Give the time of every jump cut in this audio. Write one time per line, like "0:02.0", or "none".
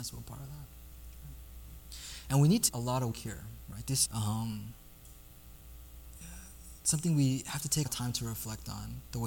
0:02.7
0:03.1
0:04.1
0:07.9